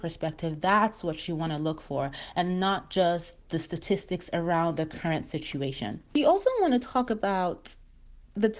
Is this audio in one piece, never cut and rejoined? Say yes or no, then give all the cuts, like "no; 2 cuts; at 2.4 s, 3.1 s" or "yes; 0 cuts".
yes; 0 cuts